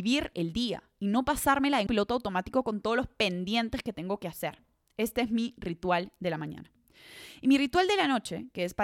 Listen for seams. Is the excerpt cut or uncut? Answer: cut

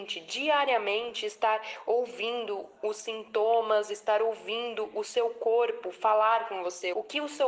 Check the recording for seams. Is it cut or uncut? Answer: uncut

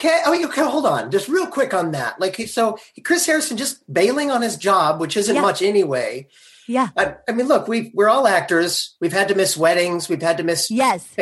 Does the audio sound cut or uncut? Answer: uncut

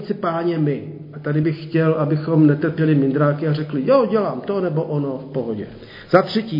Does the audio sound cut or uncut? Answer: uncut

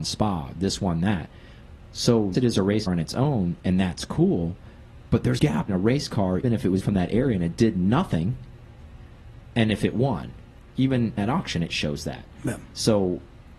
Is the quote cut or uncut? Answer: cut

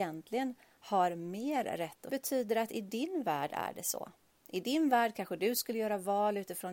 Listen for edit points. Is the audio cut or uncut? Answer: cut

